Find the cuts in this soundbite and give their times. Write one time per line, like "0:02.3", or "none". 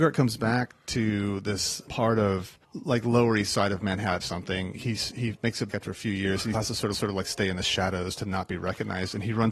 0:01.9
0:02.6
0:04.2
0:05.7
0:06.5
0:06.9